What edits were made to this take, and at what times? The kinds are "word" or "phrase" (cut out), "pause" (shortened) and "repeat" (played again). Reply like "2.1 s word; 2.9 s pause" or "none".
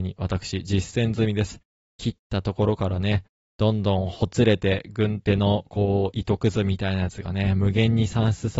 none